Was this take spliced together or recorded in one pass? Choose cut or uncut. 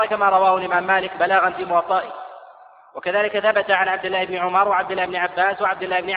uncut